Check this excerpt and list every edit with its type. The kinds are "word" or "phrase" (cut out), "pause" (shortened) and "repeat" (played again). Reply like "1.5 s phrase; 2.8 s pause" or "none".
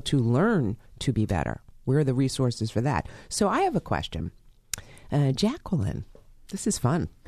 none